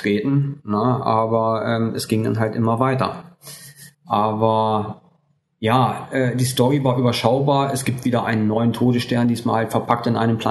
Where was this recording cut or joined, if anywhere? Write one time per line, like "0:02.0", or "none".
0:03.9